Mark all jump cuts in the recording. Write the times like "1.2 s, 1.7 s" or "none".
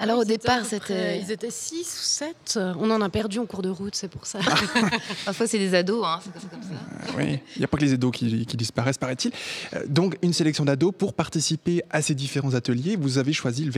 6.4 s